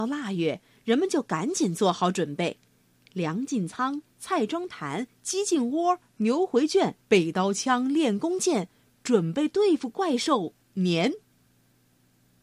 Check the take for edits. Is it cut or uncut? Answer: cut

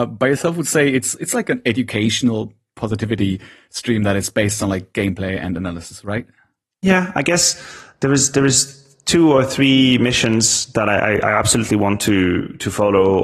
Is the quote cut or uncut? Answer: uncut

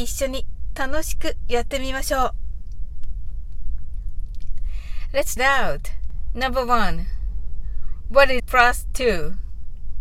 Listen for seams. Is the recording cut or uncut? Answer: cut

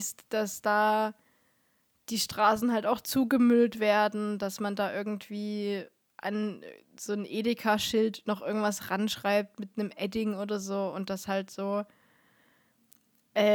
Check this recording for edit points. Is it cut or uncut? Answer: uncut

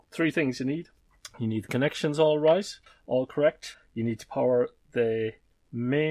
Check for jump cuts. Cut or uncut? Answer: uncut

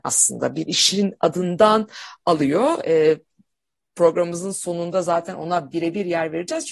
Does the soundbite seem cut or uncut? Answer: uncut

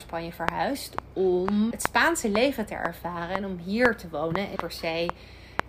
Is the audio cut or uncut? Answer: cut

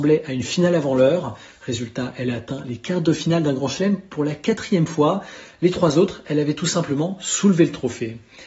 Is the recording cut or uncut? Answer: uncut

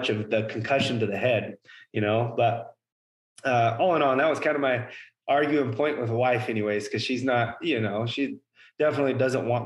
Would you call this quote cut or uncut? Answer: uncut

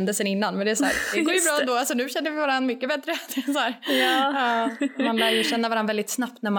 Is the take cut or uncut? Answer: uncut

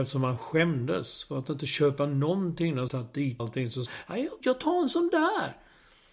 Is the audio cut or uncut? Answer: cut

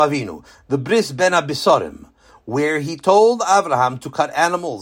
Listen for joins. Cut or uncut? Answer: uncut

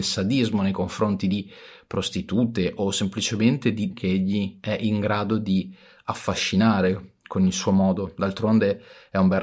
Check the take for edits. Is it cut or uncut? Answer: cut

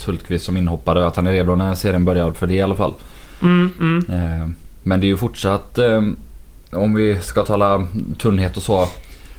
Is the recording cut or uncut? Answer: uncut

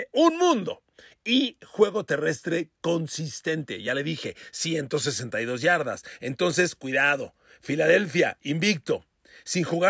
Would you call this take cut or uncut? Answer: uncut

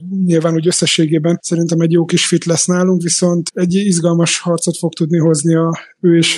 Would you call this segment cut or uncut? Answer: uncut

